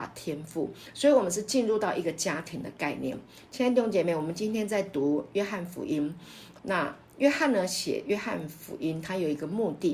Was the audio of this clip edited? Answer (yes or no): yes